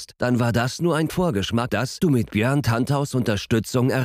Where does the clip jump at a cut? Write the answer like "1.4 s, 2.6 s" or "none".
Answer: 1.1 s, 1.7 s, 2.0 s